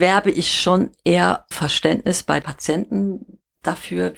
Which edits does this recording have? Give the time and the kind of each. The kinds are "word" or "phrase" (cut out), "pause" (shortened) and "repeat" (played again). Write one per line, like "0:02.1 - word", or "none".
0:01.5 - word
0:02.4 - word